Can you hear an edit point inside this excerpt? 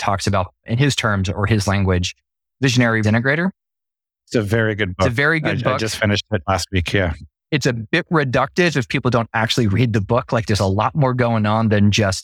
yes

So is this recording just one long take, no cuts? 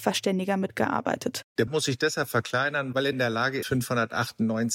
no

